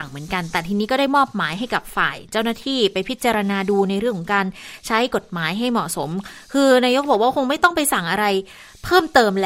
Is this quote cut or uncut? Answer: uncut